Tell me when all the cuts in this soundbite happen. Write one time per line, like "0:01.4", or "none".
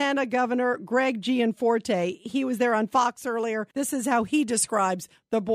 0:03.7